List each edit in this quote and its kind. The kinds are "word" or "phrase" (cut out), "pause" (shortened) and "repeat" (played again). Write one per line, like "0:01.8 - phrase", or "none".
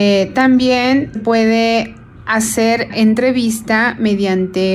0:01.1 - word
0:02.9 - word